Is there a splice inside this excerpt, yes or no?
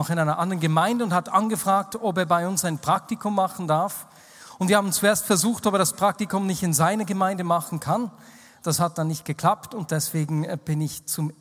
no